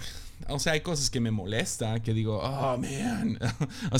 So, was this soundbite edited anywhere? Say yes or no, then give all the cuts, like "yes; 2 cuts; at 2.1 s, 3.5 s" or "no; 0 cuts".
no; 0 cuts